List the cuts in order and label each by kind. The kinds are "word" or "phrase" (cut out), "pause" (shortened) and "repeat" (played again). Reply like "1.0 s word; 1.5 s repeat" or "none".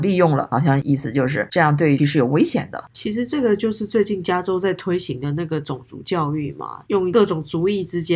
2.0 s word